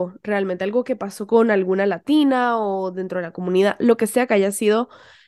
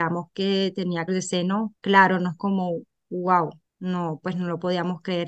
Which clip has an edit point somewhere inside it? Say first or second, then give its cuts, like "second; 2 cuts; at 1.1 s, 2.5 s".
second; 4 cuts; at 1.1 s, 1.8 s, 2.4 s, 3.7 s